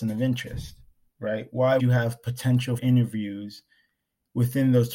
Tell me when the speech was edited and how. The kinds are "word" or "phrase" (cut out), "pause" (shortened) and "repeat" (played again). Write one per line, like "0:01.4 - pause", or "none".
0:01.8 - word
0:02.8 - word